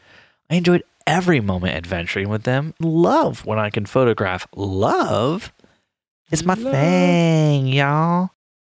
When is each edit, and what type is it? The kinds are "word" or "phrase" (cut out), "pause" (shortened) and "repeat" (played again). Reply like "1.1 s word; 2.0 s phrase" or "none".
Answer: 2.8 s word